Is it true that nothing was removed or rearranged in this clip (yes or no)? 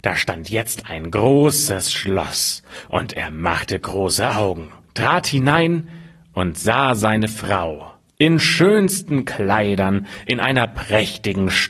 yes